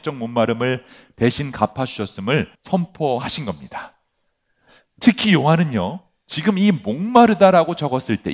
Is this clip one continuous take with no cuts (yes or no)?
no